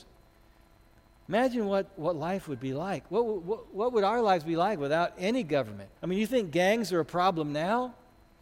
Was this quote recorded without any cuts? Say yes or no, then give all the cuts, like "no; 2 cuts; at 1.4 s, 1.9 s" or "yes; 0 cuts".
no; 1 cut; at 6.0 s